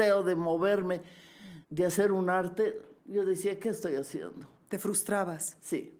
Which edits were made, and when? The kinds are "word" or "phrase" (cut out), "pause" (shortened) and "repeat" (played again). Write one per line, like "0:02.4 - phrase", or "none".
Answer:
0:01.6 - pause
0:03.0 - pause
0:04.6 - pause